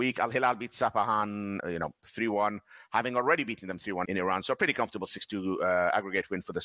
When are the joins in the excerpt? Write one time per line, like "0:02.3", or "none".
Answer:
0:01.6
0:04.0